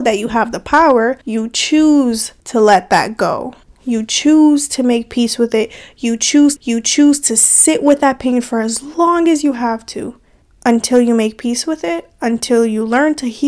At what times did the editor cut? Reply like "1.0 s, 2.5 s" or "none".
1.2 s, 2.4 s, 3.6 s, 6.6 s, 10.4 s